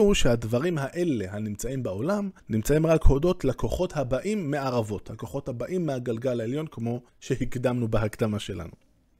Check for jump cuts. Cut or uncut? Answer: cut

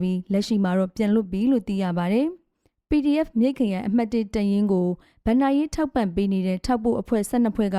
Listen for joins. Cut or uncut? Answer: uncut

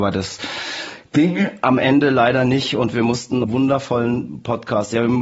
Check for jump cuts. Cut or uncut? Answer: cut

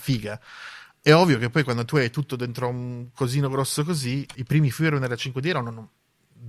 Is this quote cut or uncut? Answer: cut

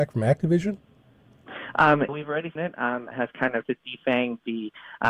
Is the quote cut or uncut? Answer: cut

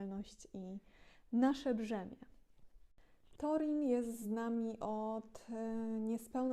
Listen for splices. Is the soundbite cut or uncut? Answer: uncut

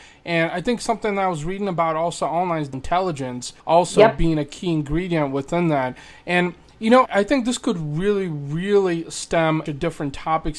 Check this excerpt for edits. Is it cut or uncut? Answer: cut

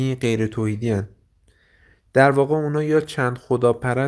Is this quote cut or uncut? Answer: uncut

